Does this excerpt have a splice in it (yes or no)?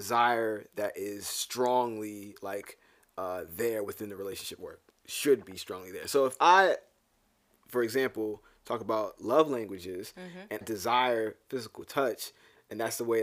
yes